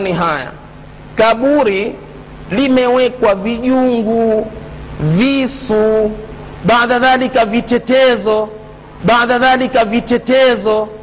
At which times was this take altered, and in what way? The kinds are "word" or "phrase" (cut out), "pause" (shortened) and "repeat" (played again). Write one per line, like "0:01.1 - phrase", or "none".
0:09.0 - repeat